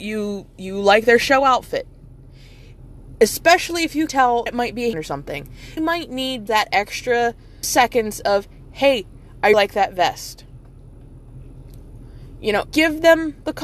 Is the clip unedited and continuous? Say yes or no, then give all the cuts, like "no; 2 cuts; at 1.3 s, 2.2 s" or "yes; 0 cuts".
no; 8 cuts; at 4.1 s, 4.5 s, 4.9 s, 5.8 s, 6.5 s, 7.6 s, 9.5 s, 12.7 s